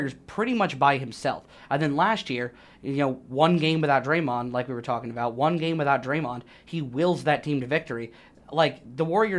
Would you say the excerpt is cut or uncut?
uncut